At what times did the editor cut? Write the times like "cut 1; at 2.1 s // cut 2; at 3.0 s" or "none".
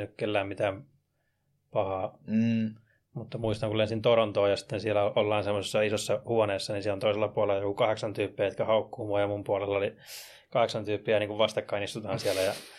none